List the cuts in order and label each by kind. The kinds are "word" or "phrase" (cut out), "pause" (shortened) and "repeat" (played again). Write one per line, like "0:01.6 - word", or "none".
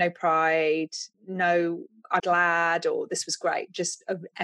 0:01.1 - pause
0:02.2 - word

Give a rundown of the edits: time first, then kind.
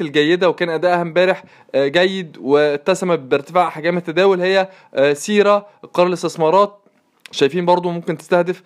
none

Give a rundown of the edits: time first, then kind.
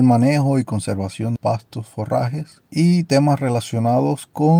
0:01.4 - phrase
0:02.7 - pause

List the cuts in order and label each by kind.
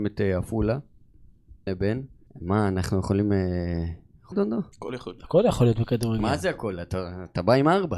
0:01.7 - word
0:02.3 - pause
0:04.3 - phrase
0:04.7 - pause

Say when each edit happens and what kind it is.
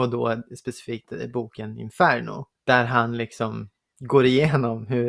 0:02.5 - pause

